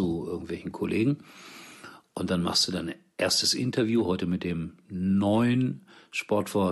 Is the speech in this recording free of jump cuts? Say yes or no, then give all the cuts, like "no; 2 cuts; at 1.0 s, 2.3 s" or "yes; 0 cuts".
yes; 0 cuts